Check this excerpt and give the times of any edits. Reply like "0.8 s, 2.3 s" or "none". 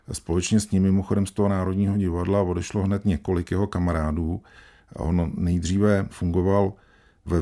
none

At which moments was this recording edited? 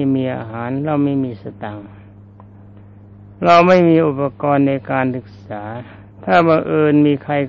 6.1 s

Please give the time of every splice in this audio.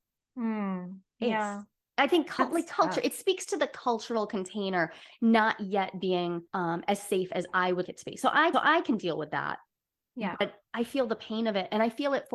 6.5 s, 7.9 s, 8.5 s

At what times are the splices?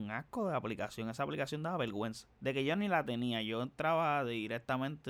2.3 s

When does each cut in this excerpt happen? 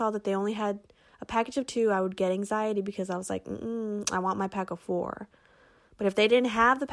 none

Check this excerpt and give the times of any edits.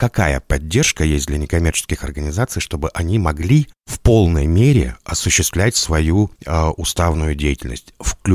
6.4 s

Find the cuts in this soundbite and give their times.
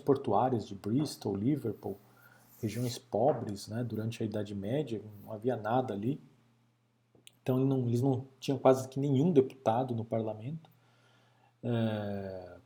none

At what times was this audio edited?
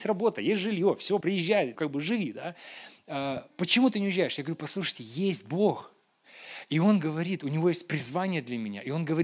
1.2 s, 1.7 s

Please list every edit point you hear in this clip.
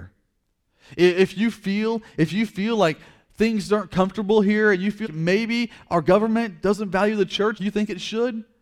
5.0 s, 7.6 s

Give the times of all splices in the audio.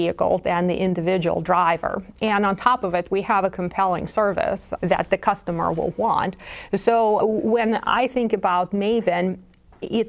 4.8 s, 7.2 s

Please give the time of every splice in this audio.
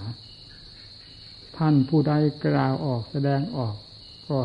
1.5 s

